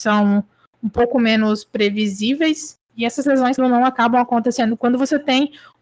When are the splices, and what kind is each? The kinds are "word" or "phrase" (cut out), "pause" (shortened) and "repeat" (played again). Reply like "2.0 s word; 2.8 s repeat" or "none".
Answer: 3.6 s word